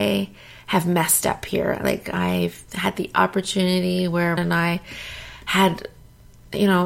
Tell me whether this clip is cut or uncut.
cut